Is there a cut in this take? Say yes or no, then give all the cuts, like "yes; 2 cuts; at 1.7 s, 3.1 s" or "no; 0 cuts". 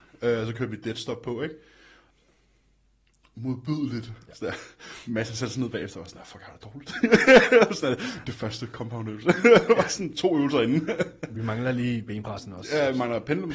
no; 0 cuts